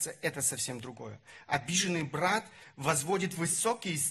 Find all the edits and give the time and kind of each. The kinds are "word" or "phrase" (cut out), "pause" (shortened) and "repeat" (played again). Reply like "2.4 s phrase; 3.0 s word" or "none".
none